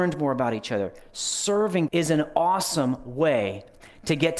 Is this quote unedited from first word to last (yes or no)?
no